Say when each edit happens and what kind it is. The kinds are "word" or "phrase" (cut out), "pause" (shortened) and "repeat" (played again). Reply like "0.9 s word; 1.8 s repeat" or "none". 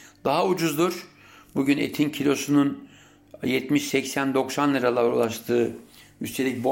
none